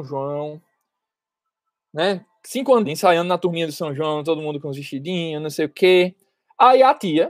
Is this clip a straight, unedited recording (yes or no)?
no